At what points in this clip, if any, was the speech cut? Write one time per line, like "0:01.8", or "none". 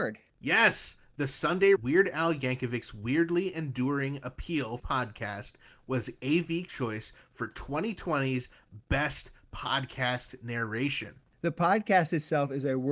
0:01.8
0:04.8
0:06.7